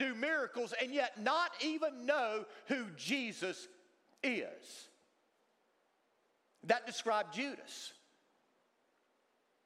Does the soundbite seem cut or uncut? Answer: uncut